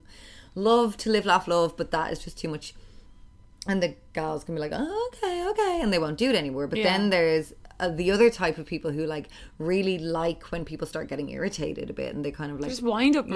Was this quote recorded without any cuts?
yes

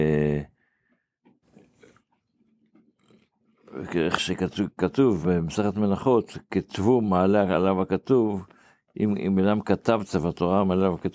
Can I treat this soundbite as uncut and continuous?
yes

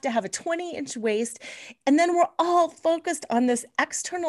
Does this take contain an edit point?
no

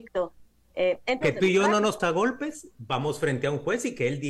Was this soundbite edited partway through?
yes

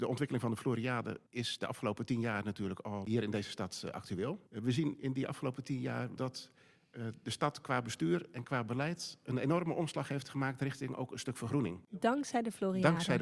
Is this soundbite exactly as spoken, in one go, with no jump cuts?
no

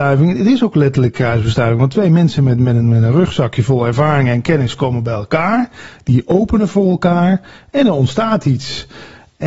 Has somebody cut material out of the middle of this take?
no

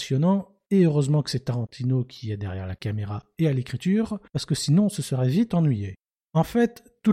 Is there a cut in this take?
yes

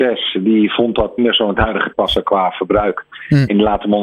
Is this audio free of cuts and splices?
no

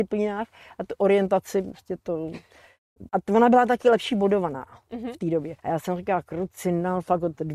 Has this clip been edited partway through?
yes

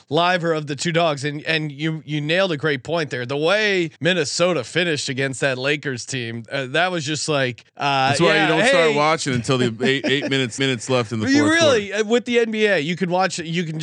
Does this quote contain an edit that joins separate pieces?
yes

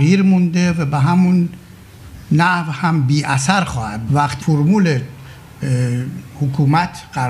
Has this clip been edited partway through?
yes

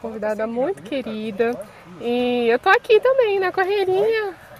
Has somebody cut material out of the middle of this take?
no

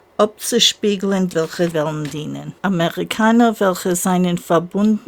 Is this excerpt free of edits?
no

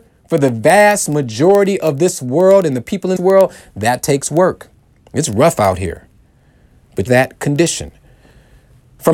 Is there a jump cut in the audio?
yes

